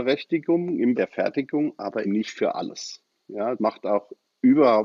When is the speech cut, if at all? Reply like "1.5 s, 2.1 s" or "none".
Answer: 0.9 s, 2.0 s, 3.6 s